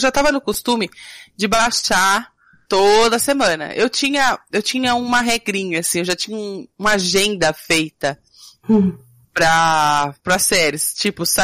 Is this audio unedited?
yes; 0 cuts

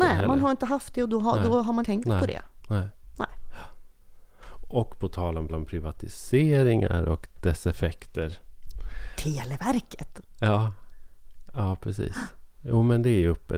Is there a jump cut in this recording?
yes; 2 cuts; at 1.8 s, 5.5 s

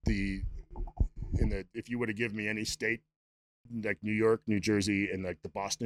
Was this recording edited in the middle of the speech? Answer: no; 0 cuts

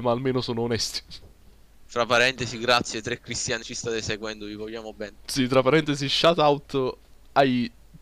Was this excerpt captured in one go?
no; 1 cut; at 3.6 s

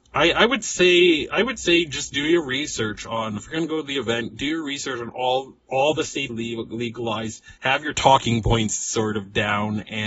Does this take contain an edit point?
yes; 3 cuts; at 3.4 s, 6.3 s, 7.6 s

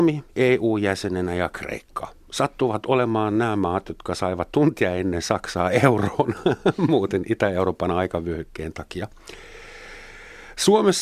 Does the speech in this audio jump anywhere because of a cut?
no; 0 cuts

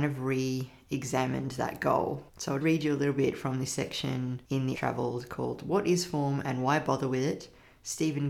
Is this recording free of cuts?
no; 4 cuts; at 2.3 s, 2.6 s, 4.4 s, 4.7 s

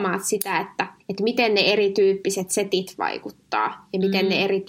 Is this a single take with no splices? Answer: no; 1 cut; at 1.0 s

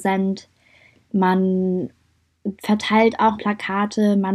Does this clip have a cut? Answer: yes; 1 cut; at 3.4 s

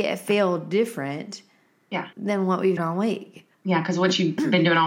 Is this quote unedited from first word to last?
no; 3 cuts; at 2.1 s, 2.8 s, 3.5 s

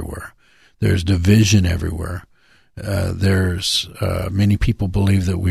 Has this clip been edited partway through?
no; 0 cuts

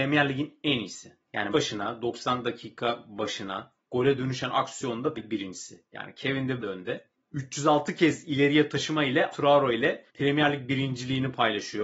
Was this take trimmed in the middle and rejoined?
yes; 7 cuts; at 1.5 s, 3.8 s, 5.2 s, 6.6 s, 8.7 s, 9.3 s, 10.1 s

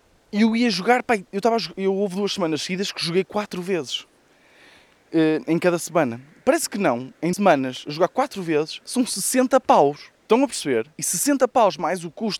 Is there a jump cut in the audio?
yes; 3 cuts; at 7.3 s, 10.2 s, 10.9 s

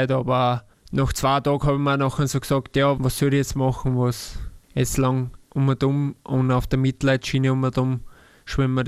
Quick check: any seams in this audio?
yes; 1 cut; at 3.0 s

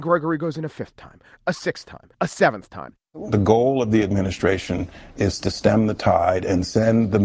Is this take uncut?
no; 1 cut; at 2.1 s

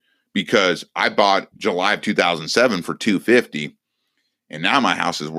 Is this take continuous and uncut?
no; 1 cut; at 1.5 s

